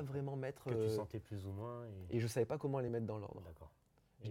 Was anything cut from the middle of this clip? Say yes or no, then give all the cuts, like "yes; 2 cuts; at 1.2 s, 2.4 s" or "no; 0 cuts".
no; 0 cuts